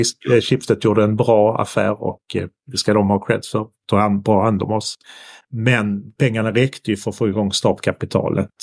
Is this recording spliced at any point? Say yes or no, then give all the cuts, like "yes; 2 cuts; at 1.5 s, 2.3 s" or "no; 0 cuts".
no; 0 cuts